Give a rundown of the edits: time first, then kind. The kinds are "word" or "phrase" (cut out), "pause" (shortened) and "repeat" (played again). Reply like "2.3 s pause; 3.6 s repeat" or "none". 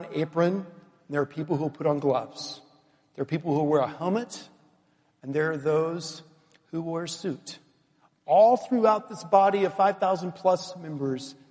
none